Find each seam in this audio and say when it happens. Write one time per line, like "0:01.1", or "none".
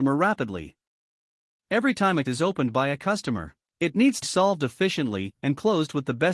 0:02.2
0:04.2